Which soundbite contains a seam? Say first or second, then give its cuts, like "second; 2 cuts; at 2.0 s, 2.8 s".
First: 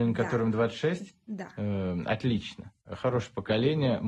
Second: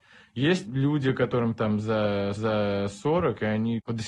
second; 1 cut; at 2.4 s